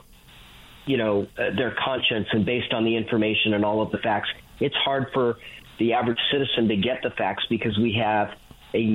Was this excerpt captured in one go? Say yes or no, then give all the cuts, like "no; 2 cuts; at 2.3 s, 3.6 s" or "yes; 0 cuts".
yes; 0 cuts